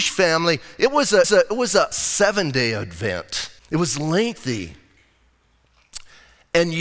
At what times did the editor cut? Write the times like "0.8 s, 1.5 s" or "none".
1.2 s, 1.9 s, 3.6 s